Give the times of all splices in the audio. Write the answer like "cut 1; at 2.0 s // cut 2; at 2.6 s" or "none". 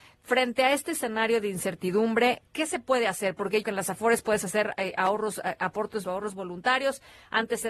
cut 1; at 2.5 s // cut 2; at 3.6 s // cut 3; at 6.0 s